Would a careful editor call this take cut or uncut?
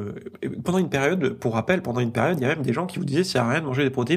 uncut